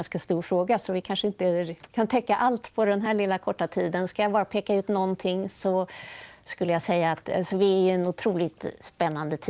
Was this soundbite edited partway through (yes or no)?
no